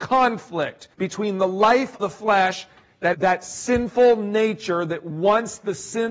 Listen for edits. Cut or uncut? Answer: cut